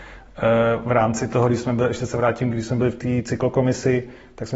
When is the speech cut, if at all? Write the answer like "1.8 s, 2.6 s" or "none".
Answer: none